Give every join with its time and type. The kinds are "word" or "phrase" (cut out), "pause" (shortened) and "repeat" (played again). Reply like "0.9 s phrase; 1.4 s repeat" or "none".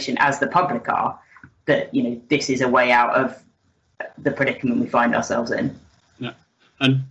none